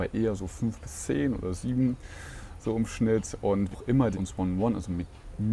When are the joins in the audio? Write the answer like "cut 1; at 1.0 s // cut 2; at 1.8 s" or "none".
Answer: cut 1; at 3.7 s // cut 2; at 4.1 s